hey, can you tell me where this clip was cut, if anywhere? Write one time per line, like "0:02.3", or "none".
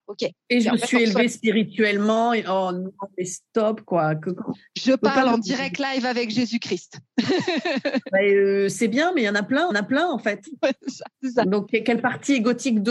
0:09.7
0:11.1
0:11.7